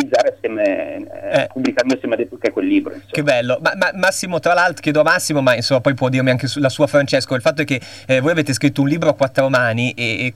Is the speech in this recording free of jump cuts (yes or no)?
yes